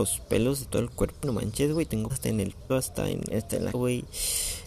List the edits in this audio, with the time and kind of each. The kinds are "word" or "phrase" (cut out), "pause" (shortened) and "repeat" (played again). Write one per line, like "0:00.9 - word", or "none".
0:01.2 - word
0:02.1 - word
0:02.7 - word
0:03.3 - word
0:03.7 - word